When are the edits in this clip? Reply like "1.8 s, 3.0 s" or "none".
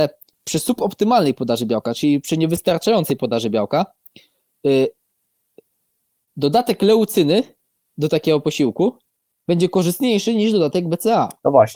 none